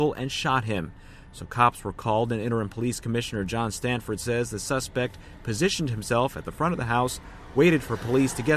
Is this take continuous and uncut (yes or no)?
yes